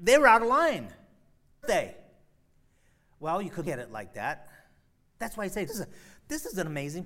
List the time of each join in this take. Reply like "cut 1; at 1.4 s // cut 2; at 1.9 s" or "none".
cut 1; at 1.6 s // cut 2; at 3.6 s // cut 3; at 5.7 s